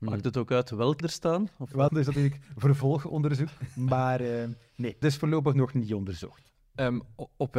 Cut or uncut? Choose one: cut